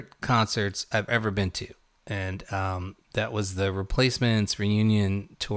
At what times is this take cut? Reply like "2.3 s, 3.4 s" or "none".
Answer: 1.1 s, 1.8 s